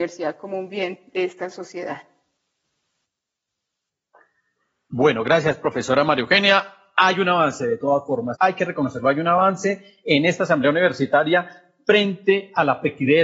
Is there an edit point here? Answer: yes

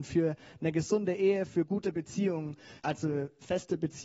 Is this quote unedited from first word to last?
no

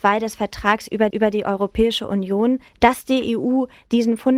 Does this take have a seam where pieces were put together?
yes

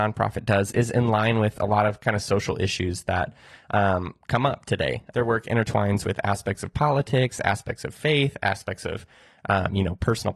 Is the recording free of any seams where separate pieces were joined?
yes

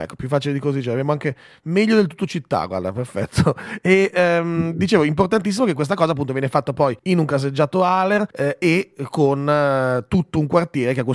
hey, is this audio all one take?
no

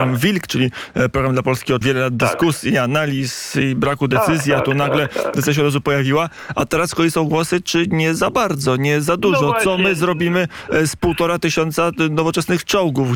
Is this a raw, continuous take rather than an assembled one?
no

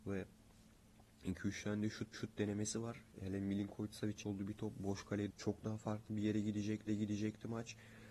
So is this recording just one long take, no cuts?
no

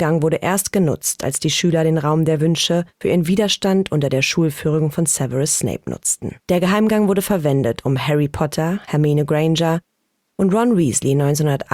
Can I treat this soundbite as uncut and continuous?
no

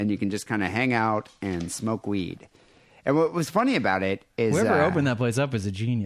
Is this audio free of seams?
yes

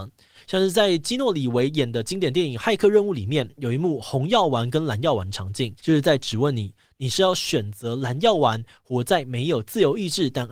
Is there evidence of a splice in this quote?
yes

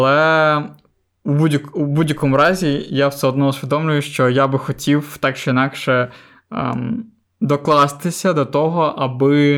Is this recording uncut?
yes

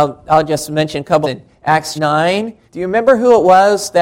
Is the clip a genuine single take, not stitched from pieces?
no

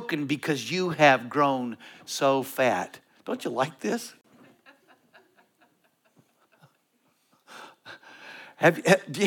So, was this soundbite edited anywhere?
no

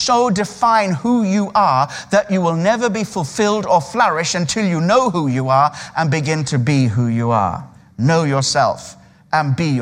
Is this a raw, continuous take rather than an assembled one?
yes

